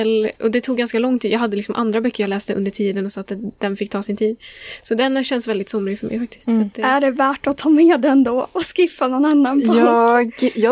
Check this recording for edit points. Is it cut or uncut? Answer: uncut